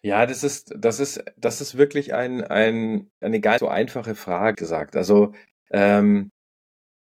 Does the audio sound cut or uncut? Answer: cut